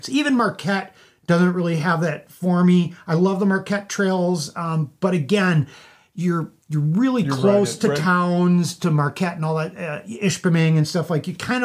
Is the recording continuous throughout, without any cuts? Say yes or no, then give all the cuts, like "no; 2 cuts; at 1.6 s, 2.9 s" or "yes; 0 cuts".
yes; 0 cuts